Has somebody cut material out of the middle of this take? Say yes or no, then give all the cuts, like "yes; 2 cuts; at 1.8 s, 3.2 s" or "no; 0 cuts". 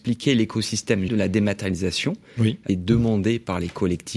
yes; 2 cuts; at 1.1 s, 2.7 s